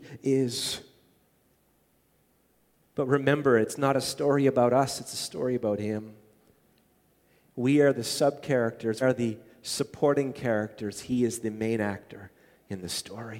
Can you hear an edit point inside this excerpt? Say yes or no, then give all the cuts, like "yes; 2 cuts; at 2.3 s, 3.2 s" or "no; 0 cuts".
yes; 1 cut; at 9.0 s